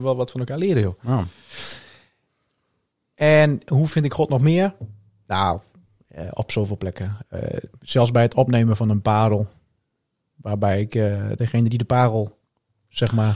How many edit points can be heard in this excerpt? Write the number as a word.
zero